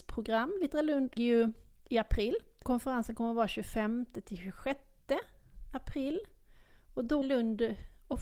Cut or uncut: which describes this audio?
cut